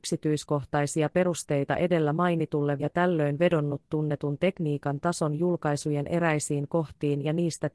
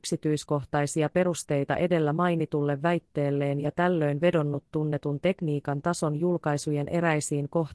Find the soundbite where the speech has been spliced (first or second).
first